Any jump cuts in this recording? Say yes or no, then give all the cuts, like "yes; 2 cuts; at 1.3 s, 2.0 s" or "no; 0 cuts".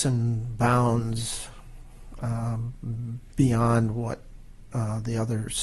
no; 0 cuts